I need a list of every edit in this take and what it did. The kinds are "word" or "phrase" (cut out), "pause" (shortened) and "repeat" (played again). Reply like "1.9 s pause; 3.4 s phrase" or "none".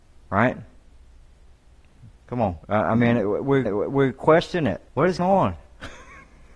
2.1 s pause; 2.6 s pause; 3.7 s repeat; 4.9 s pause; 5.2 s word